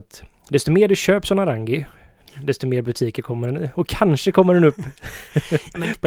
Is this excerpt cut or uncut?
uncut